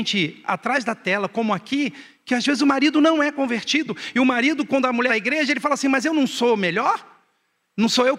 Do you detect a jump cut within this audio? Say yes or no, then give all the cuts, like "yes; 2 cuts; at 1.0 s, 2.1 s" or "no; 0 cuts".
yes; 1 cut; at 5.1 s